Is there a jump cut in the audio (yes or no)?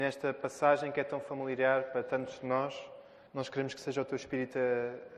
yes